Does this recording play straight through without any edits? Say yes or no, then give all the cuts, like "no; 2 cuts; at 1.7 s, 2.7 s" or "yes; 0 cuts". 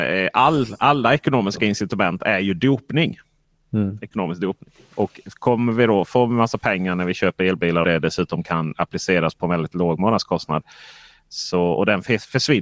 no; 1 cut; at 7.8 s